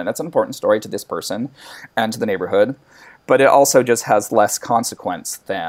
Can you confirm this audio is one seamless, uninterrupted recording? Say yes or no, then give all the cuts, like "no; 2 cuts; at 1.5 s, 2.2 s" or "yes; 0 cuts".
yes; 0 cuts